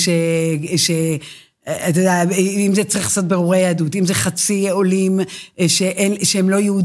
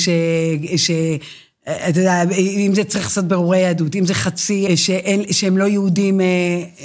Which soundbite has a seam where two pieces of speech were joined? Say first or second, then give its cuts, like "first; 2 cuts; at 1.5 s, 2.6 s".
second; 1 cut; at 4.7 s